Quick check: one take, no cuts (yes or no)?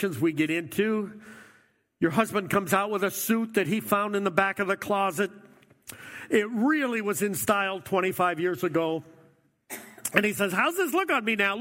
yes